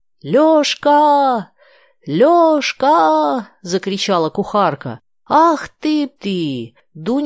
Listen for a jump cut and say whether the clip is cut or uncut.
cut